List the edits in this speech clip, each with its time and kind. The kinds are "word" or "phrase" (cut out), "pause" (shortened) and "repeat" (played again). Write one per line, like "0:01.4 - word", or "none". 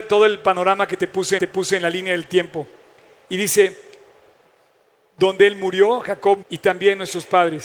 0:01.4 - repeat
0:06.4 - word